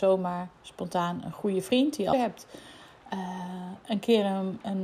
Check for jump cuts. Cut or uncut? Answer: cut